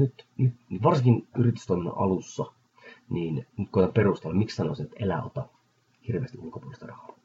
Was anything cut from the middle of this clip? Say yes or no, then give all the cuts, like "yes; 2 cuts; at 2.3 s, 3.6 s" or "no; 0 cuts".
no; 0 cuts